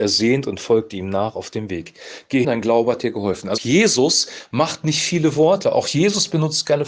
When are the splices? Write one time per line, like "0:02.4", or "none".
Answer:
0:02.4
0:03.6